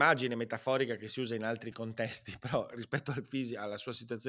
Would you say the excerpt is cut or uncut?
uncut